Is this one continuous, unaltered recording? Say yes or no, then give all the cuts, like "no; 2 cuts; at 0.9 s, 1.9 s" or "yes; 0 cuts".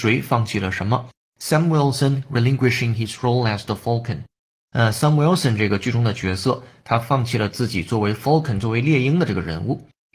yes; 0 cuts